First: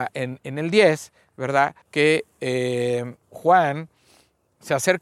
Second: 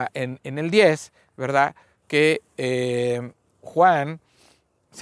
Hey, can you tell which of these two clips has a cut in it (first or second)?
first